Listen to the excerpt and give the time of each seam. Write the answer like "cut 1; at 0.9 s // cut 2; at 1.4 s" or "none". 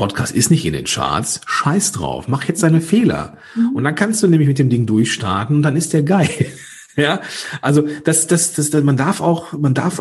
none

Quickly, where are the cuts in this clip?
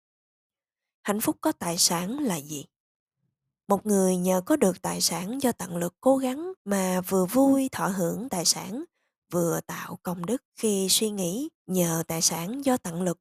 cut 1; at 6.6 s // cut 2; at 10.5 s // cut 3; at 11.5 s

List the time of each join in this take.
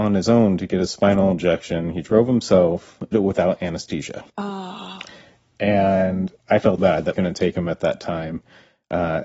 cut 1; at 3.1 s // cut 2; at 4.3 s // cut 3; at 6.4 s // cut 4; at 6.8 s // cut 5; at 7.1 s

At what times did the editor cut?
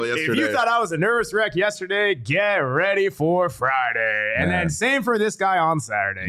none

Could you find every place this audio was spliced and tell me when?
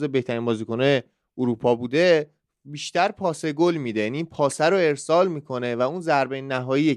none

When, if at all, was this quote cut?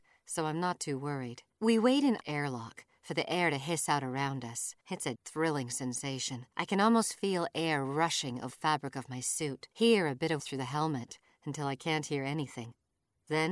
cut 1; at 1.5 s // cut 2; at 2.2 s // cut 3; at 4.8 s // cut 4; at 5.2 s // cut 5; at 6.5 s // cut 6; at 8.5 s // cut 7; at 9.7 s // cut 8; at 10.4 s

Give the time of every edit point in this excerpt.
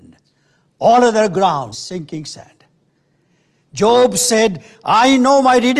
cut 1; at 1.7 s

